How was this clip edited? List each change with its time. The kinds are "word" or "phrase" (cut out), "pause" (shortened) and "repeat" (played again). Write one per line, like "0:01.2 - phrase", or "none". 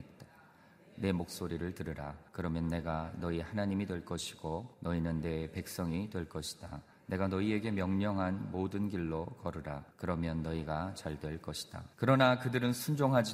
0:02.3 - pause
0:04.7 - pause
0:06.9 - pause
0:09.9 - pause
0:11.9 - pause

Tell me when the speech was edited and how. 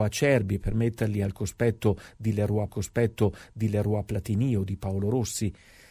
0:02.7 - repeat

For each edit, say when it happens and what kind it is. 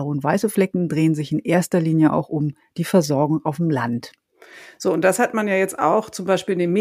none

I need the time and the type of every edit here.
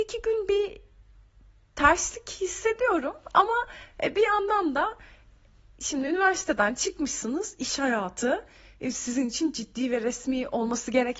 none

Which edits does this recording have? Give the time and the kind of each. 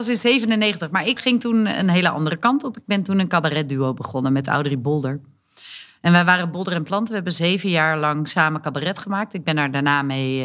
0:01.2 - word

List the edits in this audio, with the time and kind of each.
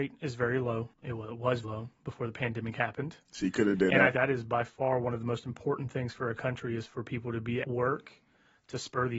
0:00.9 - pause
0:01.6 - word
0:04.1 - word
0:07.6 - word

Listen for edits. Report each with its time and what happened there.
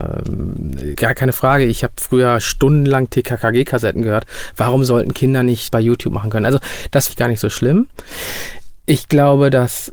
0:00.9 - word
0:05.7 - phrase
0:07.1 - word

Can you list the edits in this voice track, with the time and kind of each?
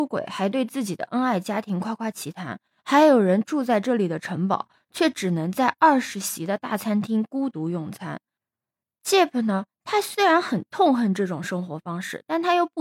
none

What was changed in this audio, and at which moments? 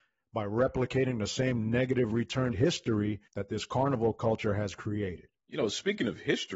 0:02.5 - word
0:03.3 - pause
0:05.4 - pause

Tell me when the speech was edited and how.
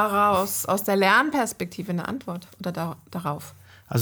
0:02.5 - pause

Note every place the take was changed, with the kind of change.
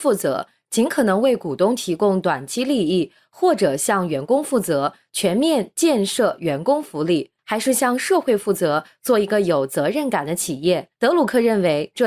0:07.4 - pause
0:10.9 - pause

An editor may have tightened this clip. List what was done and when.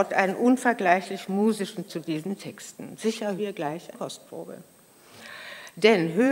0:01.9 - word
0:03.4 - word
0:03.9 - word

